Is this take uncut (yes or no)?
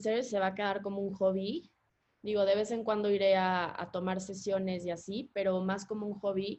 yes